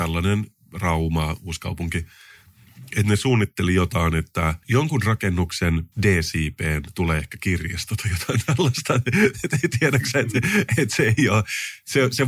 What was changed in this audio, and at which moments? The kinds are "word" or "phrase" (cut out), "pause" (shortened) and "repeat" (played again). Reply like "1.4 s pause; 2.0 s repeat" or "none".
4.6 s pause; 5.9 s pause